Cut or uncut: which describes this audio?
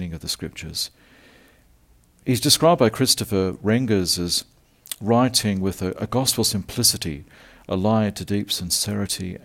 uncut